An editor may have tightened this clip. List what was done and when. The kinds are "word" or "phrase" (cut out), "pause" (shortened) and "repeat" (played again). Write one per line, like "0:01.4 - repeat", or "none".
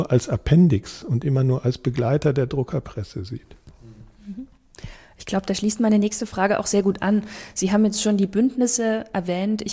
none